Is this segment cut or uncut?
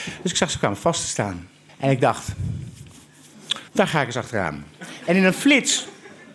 cut